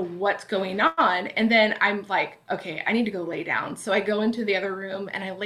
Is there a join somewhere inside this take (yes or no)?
no